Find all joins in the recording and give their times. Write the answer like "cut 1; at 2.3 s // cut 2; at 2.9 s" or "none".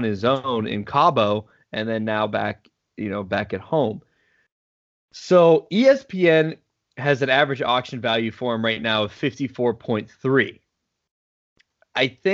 none